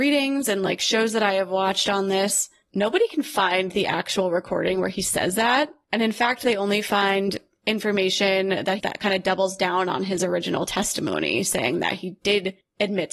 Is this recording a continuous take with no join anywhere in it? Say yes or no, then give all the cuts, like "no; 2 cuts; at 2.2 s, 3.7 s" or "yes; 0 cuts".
no; 1 cut; at 8.8 s